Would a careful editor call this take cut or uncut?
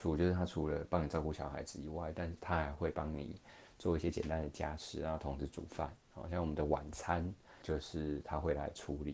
cut